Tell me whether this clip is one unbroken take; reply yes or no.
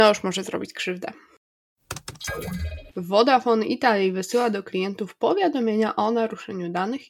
no